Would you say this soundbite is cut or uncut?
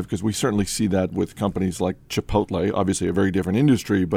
uncut